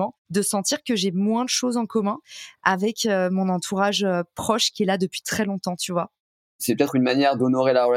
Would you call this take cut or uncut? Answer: uncut